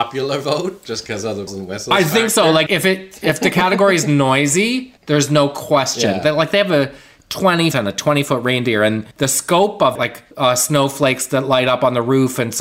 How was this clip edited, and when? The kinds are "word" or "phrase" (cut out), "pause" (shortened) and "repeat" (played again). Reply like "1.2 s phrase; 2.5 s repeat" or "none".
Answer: 1.5 s word; 2.7 s word; 5.0 s pause; 7.7 s phrase; 9.1 s pause; 10.0 s word; 10.3 s pause